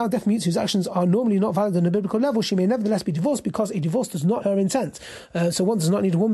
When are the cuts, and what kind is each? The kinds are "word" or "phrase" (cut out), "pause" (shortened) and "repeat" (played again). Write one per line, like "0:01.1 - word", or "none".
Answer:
0:04.4 - word